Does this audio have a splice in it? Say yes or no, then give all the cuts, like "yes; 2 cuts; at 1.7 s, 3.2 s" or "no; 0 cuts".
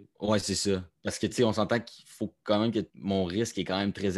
yes; 1 cut; at 2.9 s